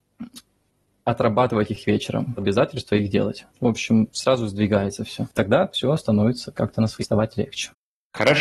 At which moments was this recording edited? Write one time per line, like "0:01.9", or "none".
0:02.4
0:03.5
0:05.3
0:07.0